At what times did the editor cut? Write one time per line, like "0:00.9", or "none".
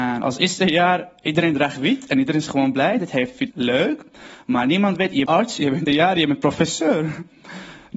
0:03.5
0:05.3
0:05.9